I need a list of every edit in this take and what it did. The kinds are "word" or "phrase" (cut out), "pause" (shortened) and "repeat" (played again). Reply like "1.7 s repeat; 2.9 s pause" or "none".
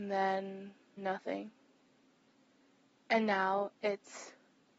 1.0 s phrase

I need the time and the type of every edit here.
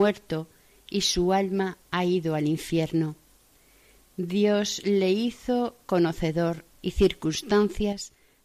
1.8 s pause; 6.7 s phrase

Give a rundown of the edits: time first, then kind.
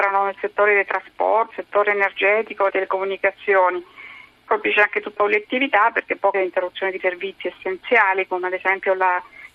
1.5 s word; 2.7 s word; 4.5 s word; 5.2 s word; 6.3 s word; 7.0 s word

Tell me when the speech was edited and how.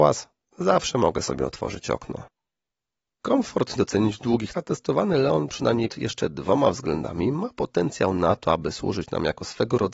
3.8 s word; 4.5 s word; 5.9 s word

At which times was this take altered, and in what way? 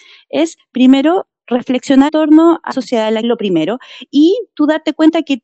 2.1 s word; 2.7 s word; 3.2 s phrase

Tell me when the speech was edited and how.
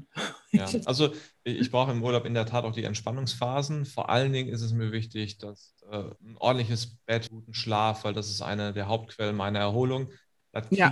6.2 s pause; 7.3 s word

